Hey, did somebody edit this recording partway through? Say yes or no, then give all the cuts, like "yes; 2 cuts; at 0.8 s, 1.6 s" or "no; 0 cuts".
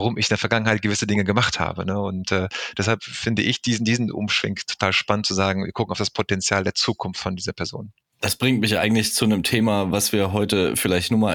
no; 0 cuts